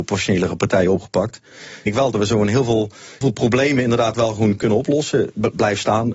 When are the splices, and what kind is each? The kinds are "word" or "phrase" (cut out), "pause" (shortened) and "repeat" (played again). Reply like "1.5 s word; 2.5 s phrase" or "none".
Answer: 1.9 s word; 3.2 s word